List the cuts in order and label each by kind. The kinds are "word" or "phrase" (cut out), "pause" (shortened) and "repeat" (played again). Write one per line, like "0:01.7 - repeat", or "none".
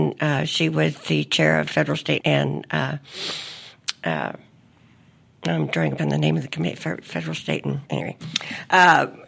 0:02.2 - word
0:06.0 - word
0:07.9 - word